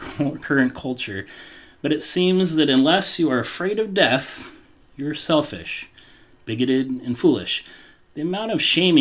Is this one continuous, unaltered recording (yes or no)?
yes